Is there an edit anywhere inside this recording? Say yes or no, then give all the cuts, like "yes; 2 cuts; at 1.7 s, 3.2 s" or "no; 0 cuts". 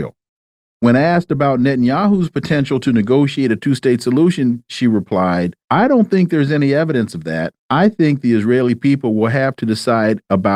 yes; 2 cuts; at 5.6 s, 7.6 s